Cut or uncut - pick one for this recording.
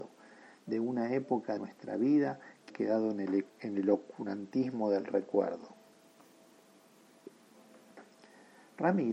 cut